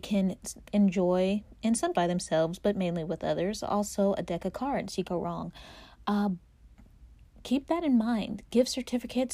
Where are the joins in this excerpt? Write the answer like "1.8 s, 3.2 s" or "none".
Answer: 1.9 s, 5.0 s, 7.3 s